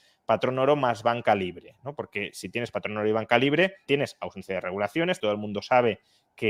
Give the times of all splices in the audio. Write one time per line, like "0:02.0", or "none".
0:03.9
0:05.2